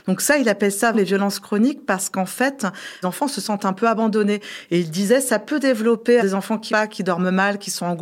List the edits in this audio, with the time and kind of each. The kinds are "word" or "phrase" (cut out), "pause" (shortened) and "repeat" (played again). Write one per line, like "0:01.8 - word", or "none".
0:00.9 - word
0:03.0 - word
0:06.2 - word
0:06.7 - word